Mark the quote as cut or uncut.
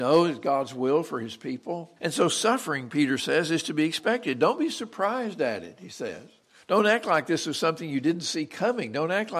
cut